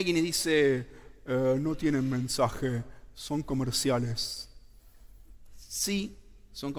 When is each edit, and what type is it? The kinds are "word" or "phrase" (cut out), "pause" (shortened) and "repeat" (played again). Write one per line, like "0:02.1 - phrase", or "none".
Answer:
none